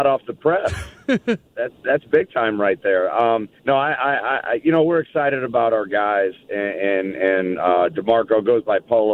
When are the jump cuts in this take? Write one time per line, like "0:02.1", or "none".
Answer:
0:03.6

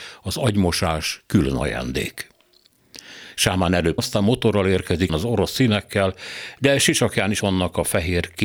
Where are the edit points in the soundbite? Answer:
0:04.0
0:05.1
0:07.4

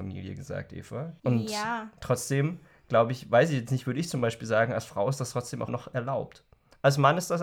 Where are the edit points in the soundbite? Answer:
0:01.2
0:05.7

